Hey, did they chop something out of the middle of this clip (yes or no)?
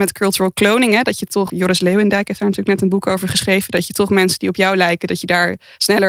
yes